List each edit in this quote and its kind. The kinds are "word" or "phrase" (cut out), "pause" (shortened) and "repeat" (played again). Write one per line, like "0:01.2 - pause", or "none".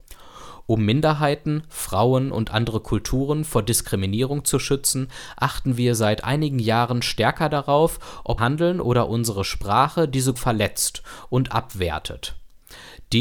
0:08.4 - word
0:10.4 - word

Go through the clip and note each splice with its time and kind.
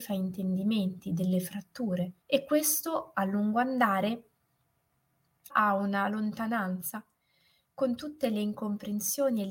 0:02.2 - pause
0:05.5 - word

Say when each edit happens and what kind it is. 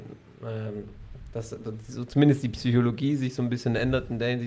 none

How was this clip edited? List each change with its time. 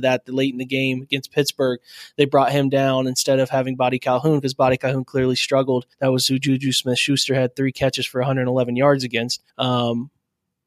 0:05.9 - pause
0:09.5 - pause

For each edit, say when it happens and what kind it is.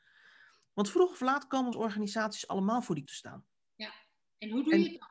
0:01.7 - phrase
0:03.1 - word

